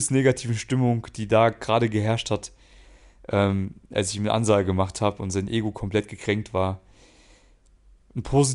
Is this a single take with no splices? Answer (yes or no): yes